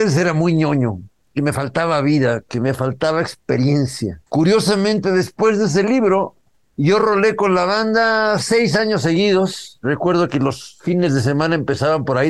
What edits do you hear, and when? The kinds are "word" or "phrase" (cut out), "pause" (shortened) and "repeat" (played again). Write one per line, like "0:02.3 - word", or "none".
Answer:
0:04.3 - pause